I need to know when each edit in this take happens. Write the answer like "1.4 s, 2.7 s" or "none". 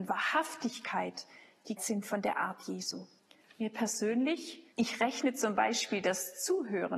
1.8 s, 3.2 s, 4.7 s